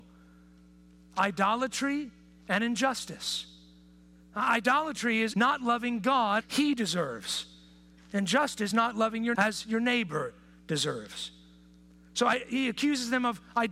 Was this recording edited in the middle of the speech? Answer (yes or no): yes